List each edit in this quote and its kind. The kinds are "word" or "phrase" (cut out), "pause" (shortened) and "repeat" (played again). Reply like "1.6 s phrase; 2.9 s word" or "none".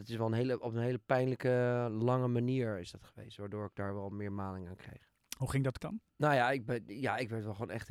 5.8 s word; 6.1 s pause